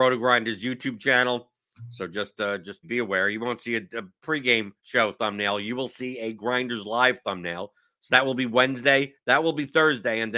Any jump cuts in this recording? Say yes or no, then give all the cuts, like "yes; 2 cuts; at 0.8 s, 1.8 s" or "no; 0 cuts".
yes; 1 cut; at 2.8 s